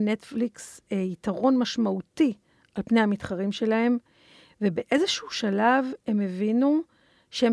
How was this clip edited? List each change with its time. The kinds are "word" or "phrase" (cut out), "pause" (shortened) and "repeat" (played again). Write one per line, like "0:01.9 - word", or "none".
none